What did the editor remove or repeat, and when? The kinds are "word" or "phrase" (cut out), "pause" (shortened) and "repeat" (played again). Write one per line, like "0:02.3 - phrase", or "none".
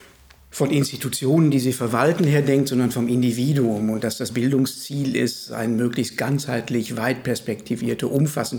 none

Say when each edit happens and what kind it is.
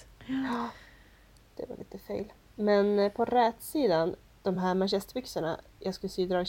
none

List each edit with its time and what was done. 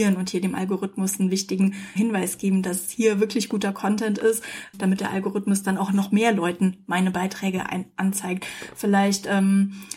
0:02.0 - word
0:04.7 - word

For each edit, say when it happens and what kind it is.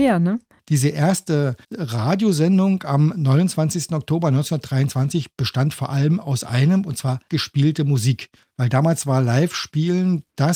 0:07.3 - word

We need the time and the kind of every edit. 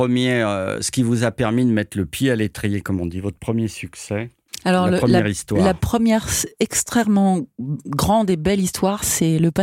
none

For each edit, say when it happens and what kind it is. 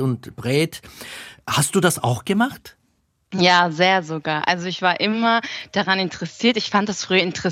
none

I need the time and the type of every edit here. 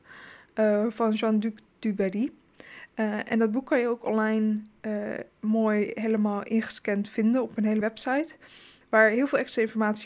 0:07.8 - word

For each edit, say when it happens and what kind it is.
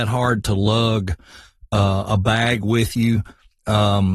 none

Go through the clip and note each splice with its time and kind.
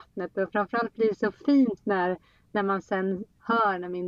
none

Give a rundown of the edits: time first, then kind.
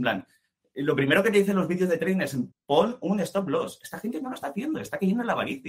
0:02.5 - pause

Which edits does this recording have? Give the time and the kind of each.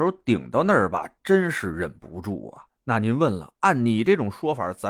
none

